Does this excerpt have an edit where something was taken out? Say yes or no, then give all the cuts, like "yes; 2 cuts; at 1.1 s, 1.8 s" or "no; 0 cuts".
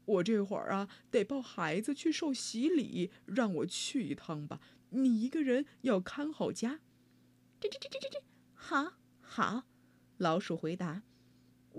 no; 0 cuts